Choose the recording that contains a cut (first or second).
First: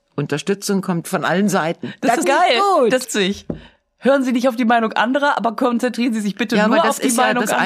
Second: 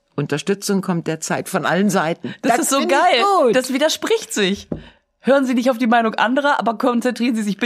first